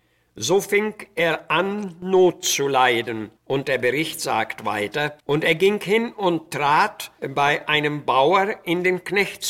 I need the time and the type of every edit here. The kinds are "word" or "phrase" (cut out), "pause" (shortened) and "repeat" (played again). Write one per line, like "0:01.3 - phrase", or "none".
0:03.4 - pause
0:05.2 - pause